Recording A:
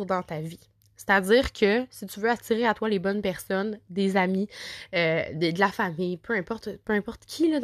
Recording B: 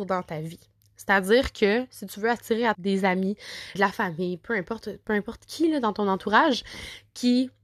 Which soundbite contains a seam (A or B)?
B